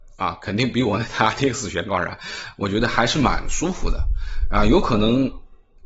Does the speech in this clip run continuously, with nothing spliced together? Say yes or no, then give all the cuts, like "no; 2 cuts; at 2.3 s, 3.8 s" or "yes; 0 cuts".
yes; 0 cuts